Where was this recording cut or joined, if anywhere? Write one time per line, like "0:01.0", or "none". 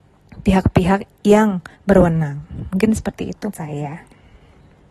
0:01.7
0:03.5